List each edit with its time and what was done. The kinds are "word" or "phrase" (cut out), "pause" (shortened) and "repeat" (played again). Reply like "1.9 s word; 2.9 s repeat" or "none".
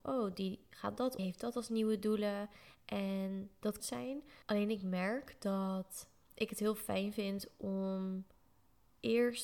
1.2 s phrase; 3.8 s phrase; 4.4 s pause